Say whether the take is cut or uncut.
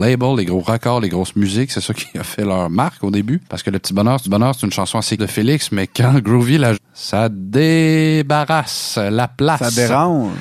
cut